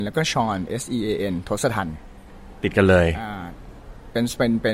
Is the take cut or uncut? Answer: uncut